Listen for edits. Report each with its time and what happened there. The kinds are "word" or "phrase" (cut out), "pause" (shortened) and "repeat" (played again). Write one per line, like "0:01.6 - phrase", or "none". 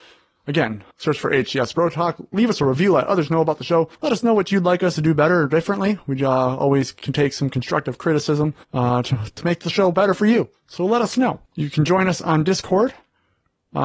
0:00.9 - pause
0:03.9 - pause
0:08.6 - pause
0:11.5 - pause